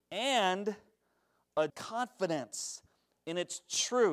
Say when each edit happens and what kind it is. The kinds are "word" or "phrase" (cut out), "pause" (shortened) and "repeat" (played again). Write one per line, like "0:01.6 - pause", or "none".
0:01.7 - word